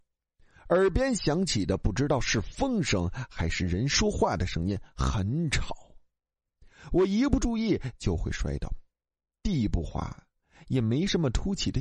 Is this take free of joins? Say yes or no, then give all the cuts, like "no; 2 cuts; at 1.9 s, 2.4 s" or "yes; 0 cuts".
yes; 0 cuts